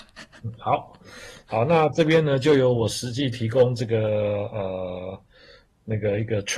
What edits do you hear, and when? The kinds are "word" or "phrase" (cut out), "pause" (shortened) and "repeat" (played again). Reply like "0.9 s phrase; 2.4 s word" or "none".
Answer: none